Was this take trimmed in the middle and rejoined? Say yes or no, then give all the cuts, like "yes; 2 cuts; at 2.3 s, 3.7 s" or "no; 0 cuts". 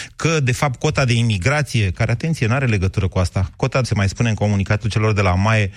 yes; 1 cut; at 3.8 s